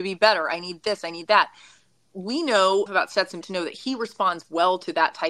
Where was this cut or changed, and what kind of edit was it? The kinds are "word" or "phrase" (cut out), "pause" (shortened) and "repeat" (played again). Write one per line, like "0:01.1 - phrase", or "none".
0:02.9 - word
0:03.4 - word